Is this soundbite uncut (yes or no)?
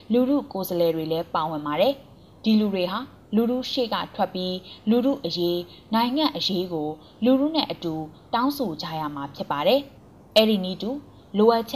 no